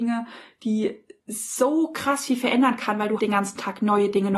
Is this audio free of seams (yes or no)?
no